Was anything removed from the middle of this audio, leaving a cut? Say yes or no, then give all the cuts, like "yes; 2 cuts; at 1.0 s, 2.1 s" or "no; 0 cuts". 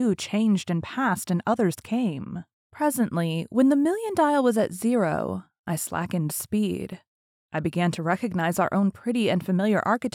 no; 0 cuts